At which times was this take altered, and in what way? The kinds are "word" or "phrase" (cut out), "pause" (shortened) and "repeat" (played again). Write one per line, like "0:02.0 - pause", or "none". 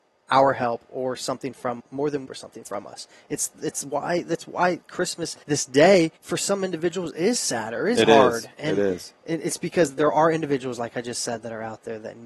0:01.8 - word
0:02.2 - phrase
0:05.4 - pause
0:06.2 - pause